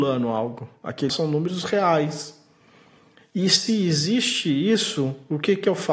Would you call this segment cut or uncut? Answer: cut